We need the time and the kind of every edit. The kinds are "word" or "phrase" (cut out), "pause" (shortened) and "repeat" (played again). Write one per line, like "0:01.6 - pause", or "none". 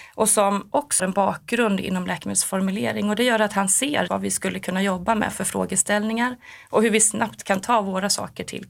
0:01.0 - word
0:04.1 - word